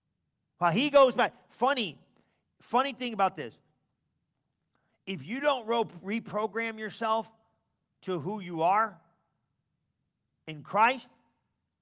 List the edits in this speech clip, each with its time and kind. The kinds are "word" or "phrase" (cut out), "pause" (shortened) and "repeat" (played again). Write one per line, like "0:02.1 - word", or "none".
none